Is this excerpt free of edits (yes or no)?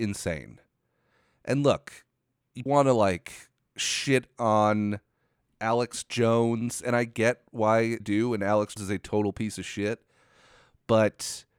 no